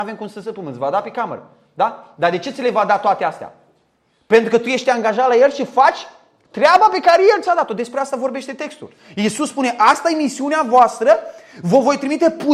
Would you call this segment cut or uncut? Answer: uncut